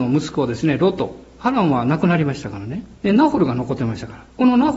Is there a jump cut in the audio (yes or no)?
yes